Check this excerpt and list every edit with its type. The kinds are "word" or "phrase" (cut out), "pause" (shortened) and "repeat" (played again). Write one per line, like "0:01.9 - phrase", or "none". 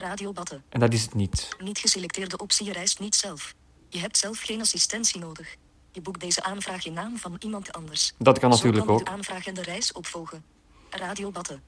none